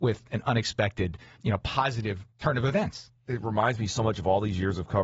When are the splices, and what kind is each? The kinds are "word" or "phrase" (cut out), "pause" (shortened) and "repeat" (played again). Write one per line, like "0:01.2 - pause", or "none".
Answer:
0:02.3 - pause